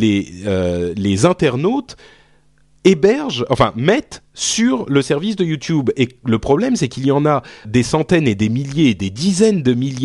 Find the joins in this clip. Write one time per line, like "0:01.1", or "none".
0:07.6

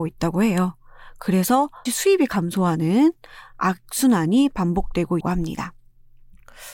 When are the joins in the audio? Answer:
0:01.9
0:05.2

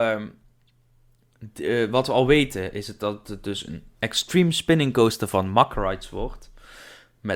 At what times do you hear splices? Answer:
none

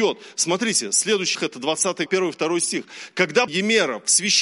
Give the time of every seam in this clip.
0:01.3
0:02.1
0:03.5

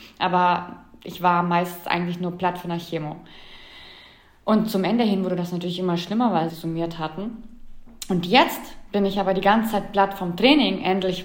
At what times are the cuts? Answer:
0:06.5

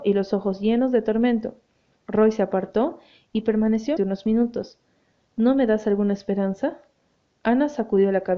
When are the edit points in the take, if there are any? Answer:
0:04.0

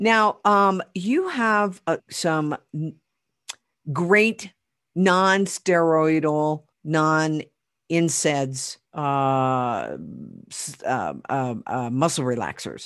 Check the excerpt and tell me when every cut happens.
0:02.0
0:04.8
0:06.7
0:08.9

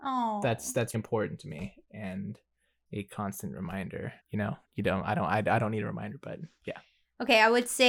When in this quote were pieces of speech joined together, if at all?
0:00.9
0:04.2
0:04.6

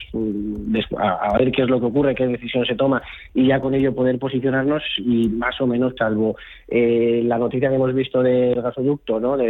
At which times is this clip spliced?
0:06.0
0:08.6

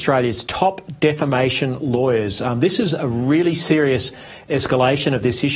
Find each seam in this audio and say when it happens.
none

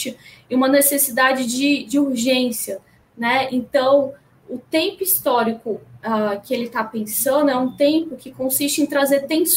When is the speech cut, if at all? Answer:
none

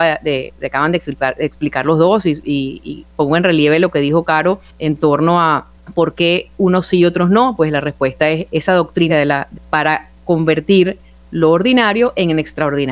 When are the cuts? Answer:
0:04.7
0:05.8
0:08.5
0:09.1
0:09.6

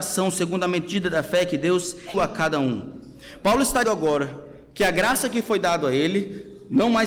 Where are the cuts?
0:02.1
0:03.8

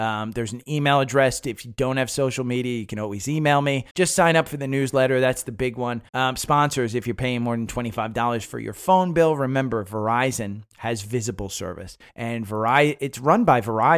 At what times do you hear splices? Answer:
0:03.9
0:06.1
0:12.1

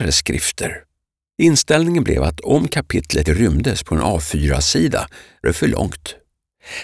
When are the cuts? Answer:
0:03.3
0:05.4

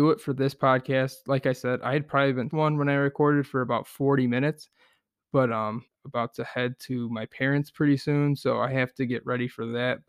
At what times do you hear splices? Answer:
0:02.5
0:05.9

